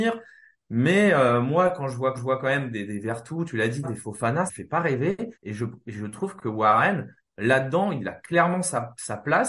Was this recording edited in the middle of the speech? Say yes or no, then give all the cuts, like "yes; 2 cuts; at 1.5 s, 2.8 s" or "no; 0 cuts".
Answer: yes; 4 cuts; at 2.2 s, 3.8 s, 4.5 s, 5.3 s